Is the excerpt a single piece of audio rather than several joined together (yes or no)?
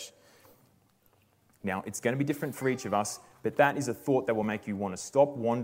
yes